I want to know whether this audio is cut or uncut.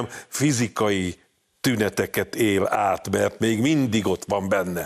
uncut